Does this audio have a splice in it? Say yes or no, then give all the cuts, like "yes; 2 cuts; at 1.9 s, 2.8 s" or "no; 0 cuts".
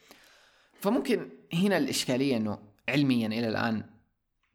no; 0 cuts